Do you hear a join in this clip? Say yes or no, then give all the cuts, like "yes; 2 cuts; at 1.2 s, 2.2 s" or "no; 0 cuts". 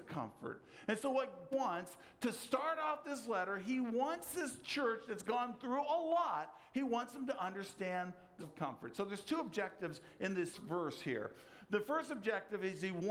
yes; 3 cuts; at 1.5 s, 8.4 s, 10.5 s